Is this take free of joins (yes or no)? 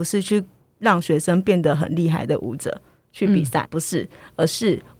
no